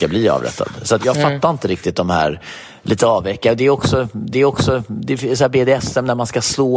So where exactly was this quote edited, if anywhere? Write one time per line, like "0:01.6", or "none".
0:01.0
0:04.3